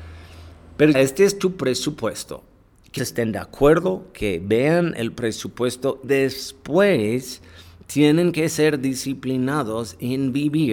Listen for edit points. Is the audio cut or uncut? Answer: cut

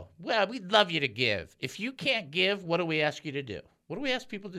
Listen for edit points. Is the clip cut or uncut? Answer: uncut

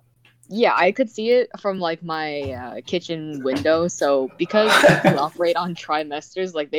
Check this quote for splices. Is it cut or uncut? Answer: uncut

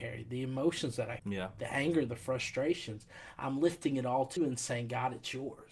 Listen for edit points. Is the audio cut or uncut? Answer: cut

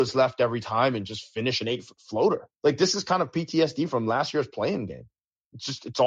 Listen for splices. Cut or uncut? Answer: cut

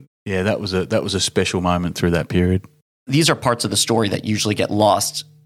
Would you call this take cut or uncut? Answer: uncut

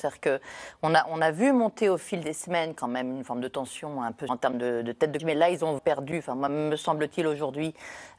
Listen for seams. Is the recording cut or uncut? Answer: cut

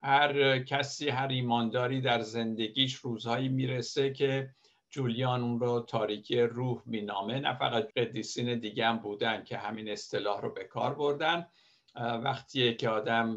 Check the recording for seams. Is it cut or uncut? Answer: cut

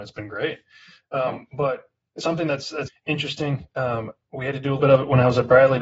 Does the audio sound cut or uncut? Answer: cut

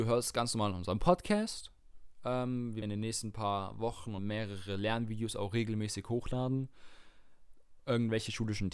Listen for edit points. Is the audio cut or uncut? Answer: cut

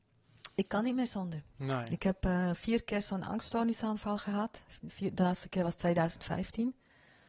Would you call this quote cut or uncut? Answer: uncut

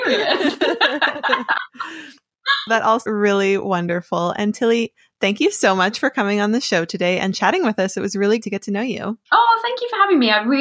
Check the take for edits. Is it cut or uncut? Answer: cut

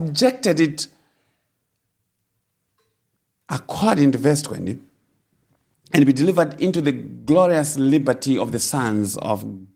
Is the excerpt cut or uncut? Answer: uncut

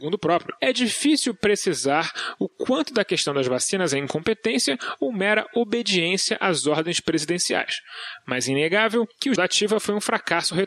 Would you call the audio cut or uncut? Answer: cut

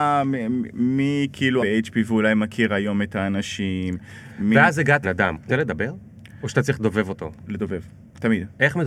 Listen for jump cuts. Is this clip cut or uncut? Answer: cut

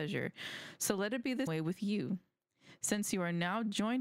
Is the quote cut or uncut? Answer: cut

